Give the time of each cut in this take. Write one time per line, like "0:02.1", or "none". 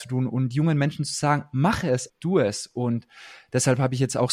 0:02.1